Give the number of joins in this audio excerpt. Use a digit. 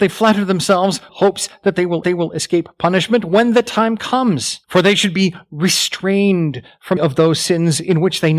4